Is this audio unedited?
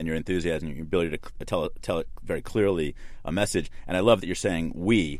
yes; 0 cuts

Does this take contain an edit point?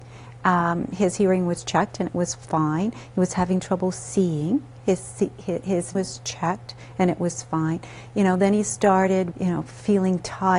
yes; 2 cuts; at 6.0 s, 9.3 s

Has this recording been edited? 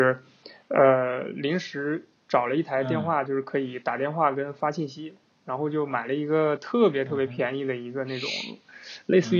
no; 0 cuts

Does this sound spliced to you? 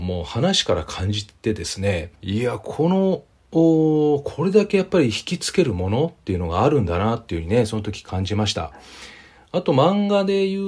yes; 1 cut; at 2.1 s

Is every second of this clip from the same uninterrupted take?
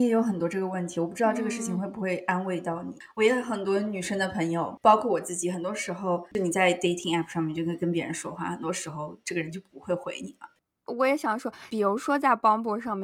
yes; 0 cuts

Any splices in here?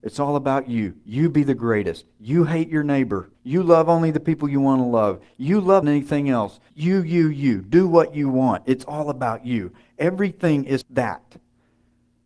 yes; 4 cuts; at 3.3 s, 5.8 s, 6.7 s, 10.8 s

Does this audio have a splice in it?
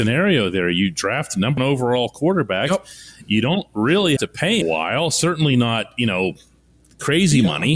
yes; 3 cuts; at 1.6 s, 4.2 s, 4.6 s

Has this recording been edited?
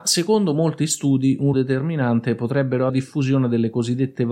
yes; 2 cuts; at 1.5 s, 2.9 s

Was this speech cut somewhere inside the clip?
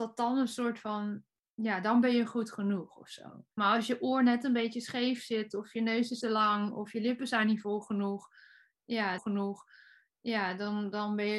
yes; 3 cuts; at 3.5 s, 6.2 s, 9.2 s

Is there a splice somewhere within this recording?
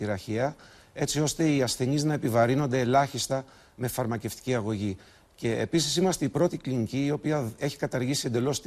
no; 0 cuts

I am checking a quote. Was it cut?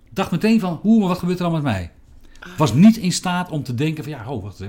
no; 0 cuts

